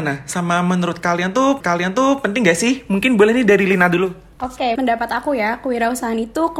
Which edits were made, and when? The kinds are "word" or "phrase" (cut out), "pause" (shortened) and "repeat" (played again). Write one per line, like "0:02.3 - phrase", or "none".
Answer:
0:01.6 - repeat
0:04.3 - pause
0:04.8 - word